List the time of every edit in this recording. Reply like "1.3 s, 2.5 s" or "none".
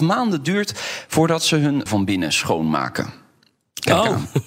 1.9 s